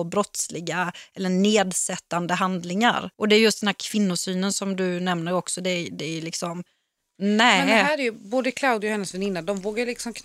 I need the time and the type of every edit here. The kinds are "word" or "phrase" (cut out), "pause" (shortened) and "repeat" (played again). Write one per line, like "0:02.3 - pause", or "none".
0:03.1 - pause